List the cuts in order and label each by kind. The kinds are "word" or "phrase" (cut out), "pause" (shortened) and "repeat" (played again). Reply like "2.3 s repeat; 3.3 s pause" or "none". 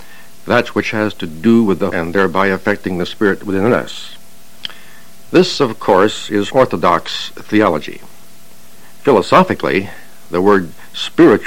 1.9 s phrase; 6.5 s word